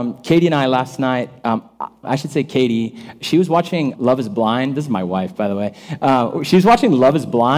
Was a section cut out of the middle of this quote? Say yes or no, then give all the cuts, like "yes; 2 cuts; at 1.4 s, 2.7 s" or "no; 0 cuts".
yes; 2 cuts; at 2.0 s, 3.9 s